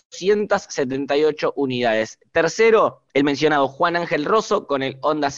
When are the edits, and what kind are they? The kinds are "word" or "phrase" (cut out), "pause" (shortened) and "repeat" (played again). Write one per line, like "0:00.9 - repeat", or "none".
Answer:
0:03.1 - pause